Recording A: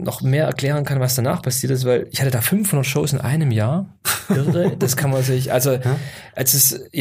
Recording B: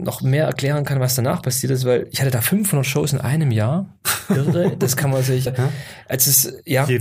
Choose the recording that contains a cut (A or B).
B